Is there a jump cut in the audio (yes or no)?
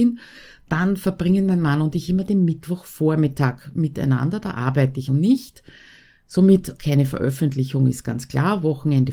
yes